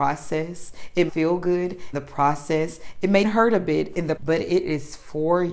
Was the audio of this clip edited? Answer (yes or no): yes